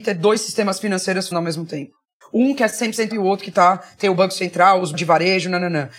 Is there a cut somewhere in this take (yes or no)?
yes